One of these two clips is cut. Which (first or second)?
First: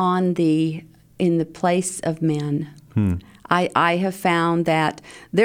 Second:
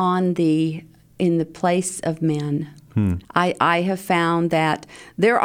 second